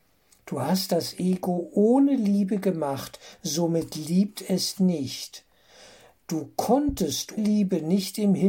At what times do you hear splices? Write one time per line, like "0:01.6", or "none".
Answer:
0:04.8
0:07.4